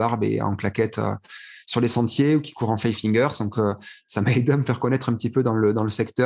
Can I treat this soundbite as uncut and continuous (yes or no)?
yes